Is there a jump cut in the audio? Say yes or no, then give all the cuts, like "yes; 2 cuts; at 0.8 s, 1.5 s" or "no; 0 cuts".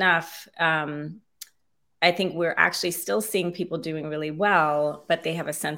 no; 0 cuts